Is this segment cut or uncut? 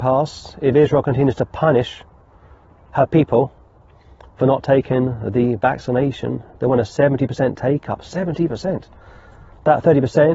uncut